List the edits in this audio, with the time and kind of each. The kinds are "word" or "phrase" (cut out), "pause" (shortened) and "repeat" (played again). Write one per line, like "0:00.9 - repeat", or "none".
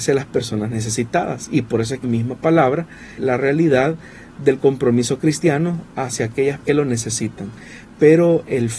0:02.0 - word
0:03.2 - word
0:06.6 - word